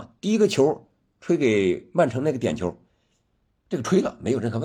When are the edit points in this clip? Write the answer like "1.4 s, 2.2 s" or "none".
none